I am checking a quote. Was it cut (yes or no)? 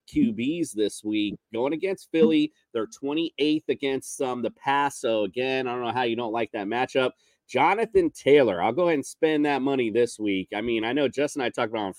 no